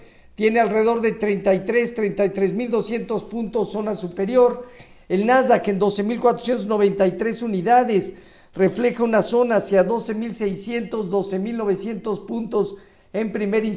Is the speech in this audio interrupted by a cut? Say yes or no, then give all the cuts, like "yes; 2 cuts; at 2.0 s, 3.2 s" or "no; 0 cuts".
no; 0 cuts